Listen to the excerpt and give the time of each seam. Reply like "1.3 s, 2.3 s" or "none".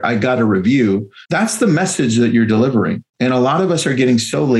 1.2 s, 3.1 s